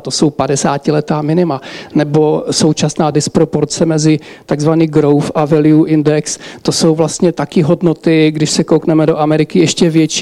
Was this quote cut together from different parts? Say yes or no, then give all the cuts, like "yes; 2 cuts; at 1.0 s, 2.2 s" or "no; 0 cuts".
no; 0 cuts